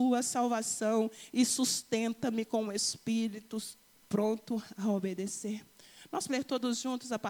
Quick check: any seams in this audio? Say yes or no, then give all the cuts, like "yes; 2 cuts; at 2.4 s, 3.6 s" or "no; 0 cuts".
yes; 1 cut; at 6.3 s